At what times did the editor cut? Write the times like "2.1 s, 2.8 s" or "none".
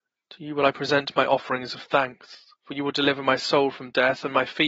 2.5 s

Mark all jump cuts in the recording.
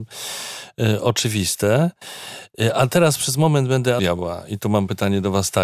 4.0 s

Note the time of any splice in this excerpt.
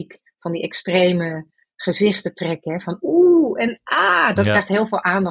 none

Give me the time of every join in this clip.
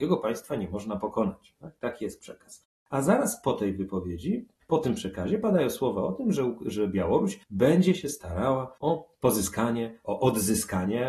7.4 s, 8.8 s

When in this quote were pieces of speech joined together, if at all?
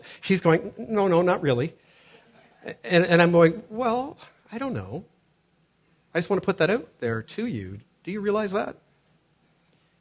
none

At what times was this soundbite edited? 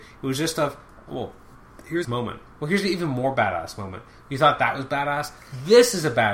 2.0 s

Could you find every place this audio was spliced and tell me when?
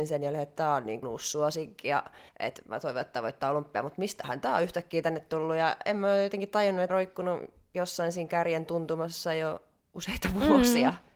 1.0 s, 2.3 s, 6.9 s

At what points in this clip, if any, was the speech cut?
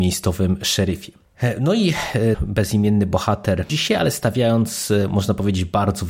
2.3 s, 3.7 s

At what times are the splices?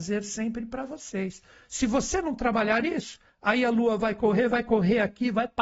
none

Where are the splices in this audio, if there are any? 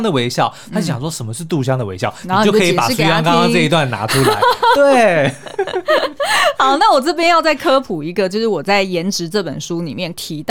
none

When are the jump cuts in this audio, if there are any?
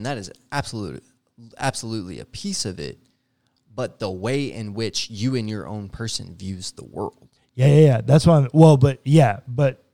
7.4 s

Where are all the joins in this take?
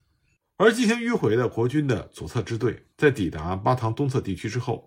2.9 s

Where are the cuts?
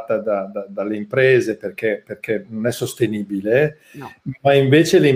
none

